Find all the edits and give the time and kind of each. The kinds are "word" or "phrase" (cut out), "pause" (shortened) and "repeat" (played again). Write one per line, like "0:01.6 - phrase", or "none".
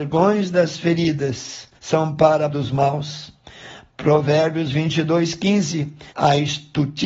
0:01.7 - pause
0:02.5 - word
0:06.1 - pause